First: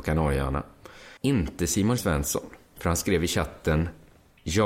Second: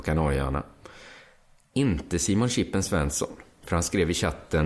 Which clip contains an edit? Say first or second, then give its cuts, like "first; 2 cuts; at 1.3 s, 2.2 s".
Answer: first; 2 cuts; at 1.2 s, 2.0 s